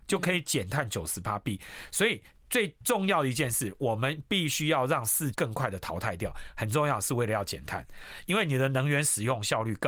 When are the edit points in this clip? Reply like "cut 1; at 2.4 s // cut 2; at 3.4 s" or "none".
cut 1; at 5.3 s